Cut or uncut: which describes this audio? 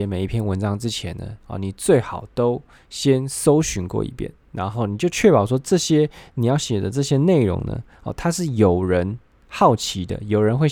uncut